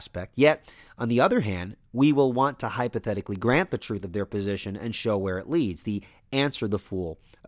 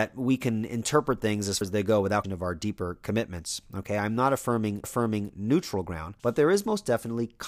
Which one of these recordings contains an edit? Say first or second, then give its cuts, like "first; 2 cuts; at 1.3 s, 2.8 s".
second; 4 cuts; at 1.6 s, 2.2 s, 4.8 s, 6.2 s